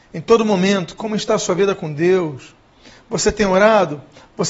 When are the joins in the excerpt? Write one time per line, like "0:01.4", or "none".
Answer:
none